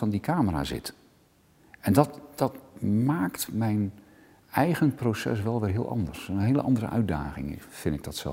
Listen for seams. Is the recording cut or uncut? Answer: uncut